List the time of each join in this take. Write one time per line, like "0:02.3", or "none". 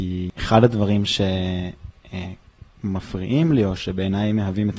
none